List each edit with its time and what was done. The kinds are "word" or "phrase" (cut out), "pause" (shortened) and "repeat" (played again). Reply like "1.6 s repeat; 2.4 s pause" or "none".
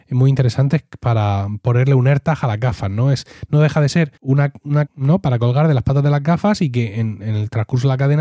4.2 s pause; 4.9 s word